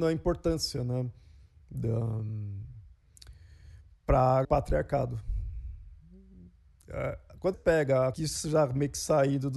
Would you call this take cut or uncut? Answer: cut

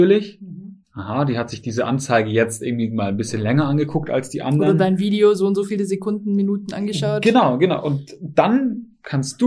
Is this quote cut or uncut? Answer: uncut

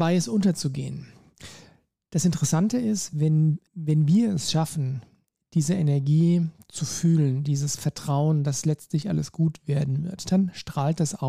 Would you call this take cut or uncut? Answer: uncut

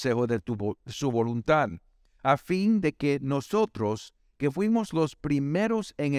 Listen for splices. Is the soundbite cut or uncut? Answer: uncut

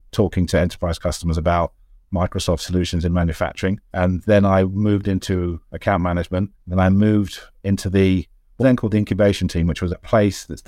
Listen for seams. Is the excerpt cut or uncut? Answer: cut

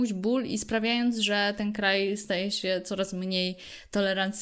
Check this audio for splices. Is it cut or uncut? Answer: uncut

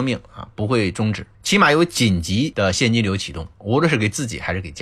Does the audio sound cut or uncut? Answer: cut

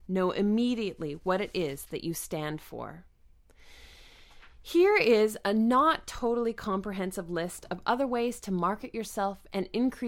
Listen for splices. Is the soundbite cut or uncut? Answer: uncut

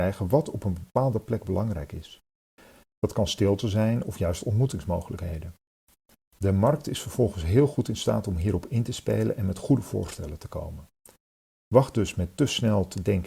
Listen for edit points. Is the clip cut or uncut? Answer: uncut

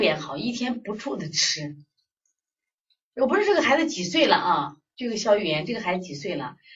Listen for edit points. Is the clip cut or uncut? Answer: uncut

